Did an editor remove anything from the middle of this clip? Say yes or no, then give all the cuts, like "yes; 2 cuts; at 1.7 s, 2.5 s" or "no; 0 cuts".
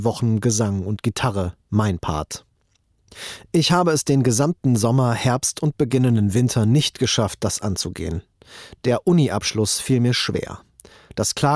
yes; 1 cut; at 1.6 s